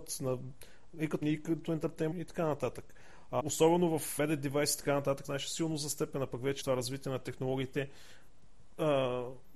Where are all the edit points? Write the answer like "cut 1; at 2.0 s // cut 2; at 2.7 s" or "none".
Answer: cut 1; at 1.2 s // cut 2; at 2.1 s // cut 3; at 3.4 s // cut 4; at 4.2 s // cut 5; at 5.2 s // cut 6; at 6.6 s